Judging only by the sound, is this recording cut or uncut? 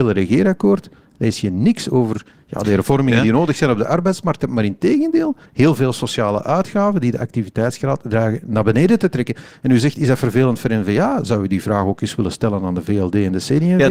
cut